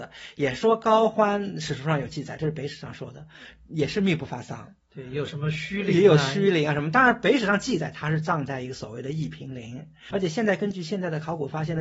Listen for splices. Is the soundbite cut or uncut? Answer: cut